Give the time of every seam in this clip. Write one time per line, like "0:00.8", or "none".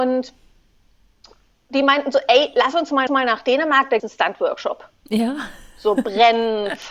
0:03.1
0:04.0